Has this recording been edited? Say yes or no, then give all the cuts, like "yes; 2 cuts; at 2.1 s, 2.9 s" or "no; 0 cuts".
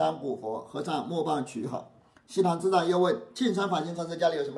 no; 0 cuts